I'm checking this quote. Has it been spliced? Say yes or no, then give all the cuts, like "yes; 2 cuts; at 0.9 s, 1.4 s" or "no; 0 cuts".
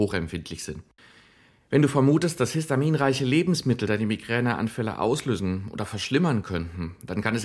no; 0 cuts